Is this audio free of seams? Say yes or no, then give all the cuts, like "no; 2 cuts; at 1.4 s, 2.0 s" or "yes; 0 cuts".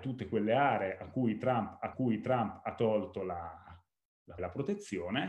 no; 2 cuts; at 1.9 s, 4.4 s